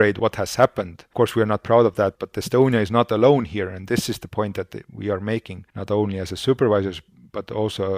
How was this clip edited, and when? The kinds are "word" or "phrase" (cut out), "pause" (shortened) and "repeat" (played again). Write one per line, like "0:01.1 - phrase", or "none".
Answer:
0:05.7 - pause